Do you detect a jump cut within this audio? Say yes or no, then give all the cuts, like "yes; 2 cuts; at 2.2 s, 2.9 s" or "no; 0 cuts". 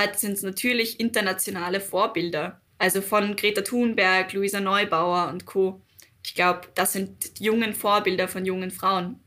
yes; 1 cut; at 2.7 s